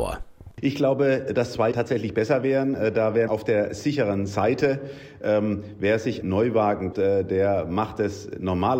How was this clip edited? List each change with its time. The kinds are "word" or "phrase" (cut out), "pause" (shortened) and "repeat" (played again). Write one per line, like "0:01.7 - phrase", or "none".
0:01.7 - word
0:03.3 - word
0:06.2 - word
0:06.9 - word